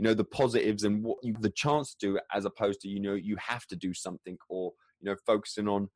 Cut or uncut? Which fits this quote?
cut